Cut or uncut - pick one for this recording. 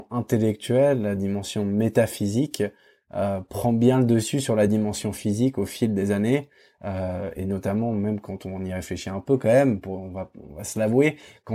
uncut